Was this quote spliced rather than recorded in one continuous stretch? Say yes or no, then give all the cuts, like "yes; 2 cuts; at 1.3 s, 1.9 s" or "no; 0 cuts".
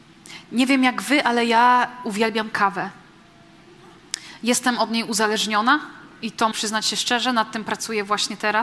yes; 1 cut; at 6.5 s